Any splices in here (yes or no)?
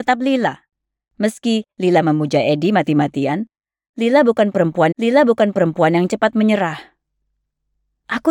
yes